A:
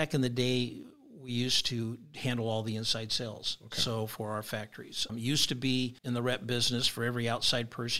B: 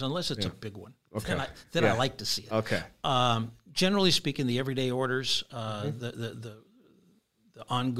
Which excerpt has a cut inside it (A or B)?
A